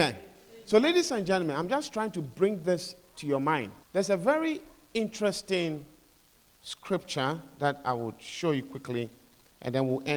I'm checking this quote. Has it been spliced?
yes; 1 cut; at 3.8 s

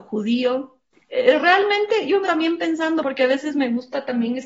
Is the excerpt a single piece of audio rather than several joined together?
no; 2 cuts; at 2.3 s, 3.0 s

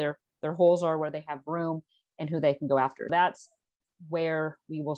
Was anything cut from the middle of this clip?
yes; 1 cut; at 3.1 s

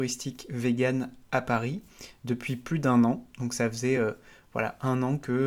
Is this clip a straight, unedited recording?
yes; 0 cuts

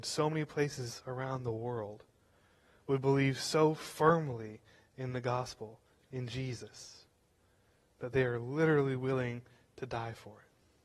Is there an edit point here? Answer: no; 0 cuts

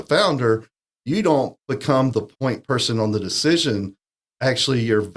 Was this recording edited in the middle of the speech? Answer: no; 0 cuts

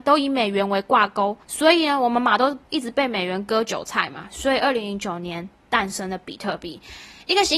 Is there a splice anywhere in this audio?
yes; 1 cut; at 1.4 s

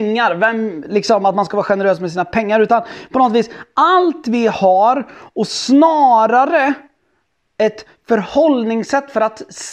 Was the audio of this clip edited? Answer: no; 0 cuts

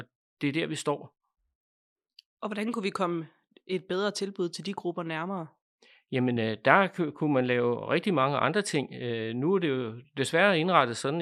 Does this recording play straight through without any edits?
yes; 0 cuts

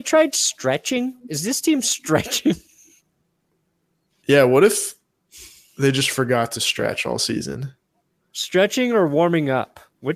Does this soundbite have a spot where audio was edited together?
no; 0 cuts

